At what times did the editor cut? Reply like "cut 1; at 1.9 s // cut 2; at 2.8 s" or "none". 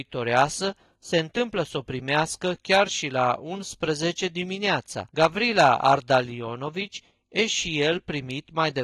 cut 1; at 5.1 s